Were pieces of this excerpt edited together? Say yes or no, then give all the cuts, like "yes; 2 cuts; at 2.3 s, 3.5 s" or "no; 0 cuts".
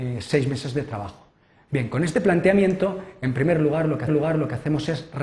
yes; 1 cut; at 4.1 s